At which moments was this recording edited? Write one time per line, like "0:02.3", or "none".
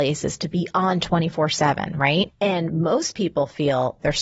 none